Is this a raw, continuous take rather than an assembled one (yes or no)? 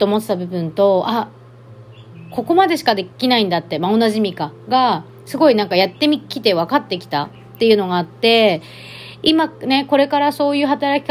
no